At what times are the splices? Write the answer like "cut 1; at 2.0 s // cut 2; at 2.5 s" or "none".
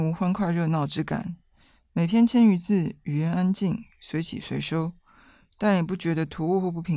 none